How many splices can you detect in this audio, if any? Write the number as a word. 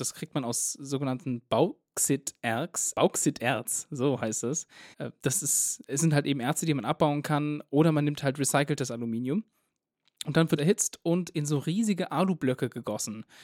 three